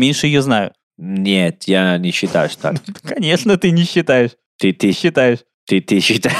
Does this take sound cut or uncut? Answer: cut